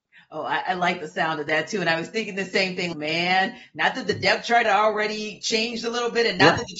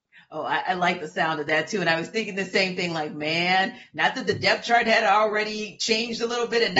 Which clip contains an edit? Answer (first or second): first